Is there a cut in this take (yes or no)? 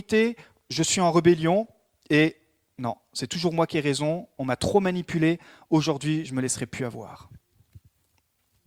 no